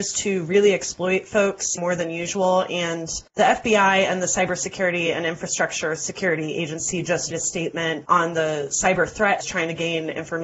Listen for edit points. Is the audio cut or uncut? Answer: cut